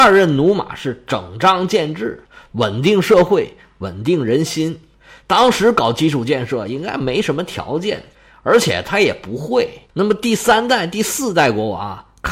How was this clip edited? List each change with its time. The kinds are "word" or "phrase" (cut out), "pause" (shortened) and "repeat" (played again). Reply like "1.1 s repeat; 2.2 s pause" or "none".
9.9 s pause